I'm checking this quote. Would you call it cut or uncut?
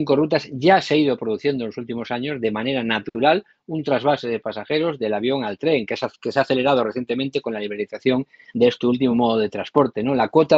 uncut